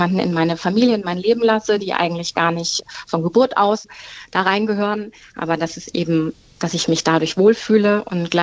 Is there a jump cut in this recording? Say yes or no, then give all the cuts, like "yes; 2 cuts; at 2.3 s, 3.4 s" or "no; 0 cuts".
no; 0 cuts